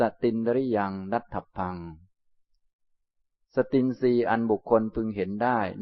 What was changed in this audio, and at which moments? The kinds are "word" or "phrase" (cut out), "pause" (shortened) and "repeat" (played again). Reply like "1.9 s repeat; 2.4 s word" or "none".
none